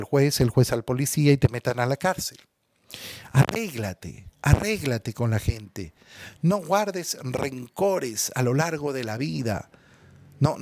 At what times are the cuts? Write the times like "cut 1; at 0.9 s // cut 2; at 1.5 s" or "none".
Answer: cut 1; at 4.3 s